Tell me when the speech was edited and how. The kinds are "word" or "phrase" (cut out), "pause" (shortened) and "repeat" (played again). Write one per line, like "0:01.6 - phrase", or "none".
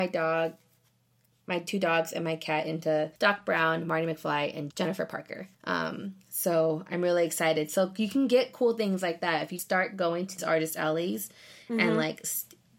0:03.2 - pause
0:04.7 - word
0:05.5 - pause
0:09.6 - word
0:10.4 - word